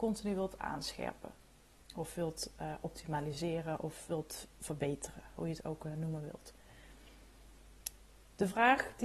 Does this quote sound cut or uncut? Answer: uncut